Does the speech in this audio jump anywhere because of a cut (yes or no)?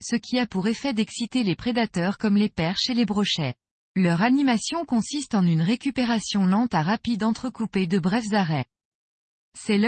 yes